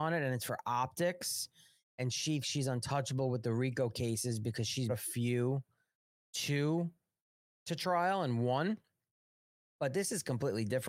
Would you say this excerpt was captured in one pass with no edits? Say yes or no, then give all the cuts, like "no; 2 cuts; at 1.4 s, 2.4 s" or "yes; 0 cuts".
no; 3 cuts; at 2.4 s, 4.9 s, 7.5 s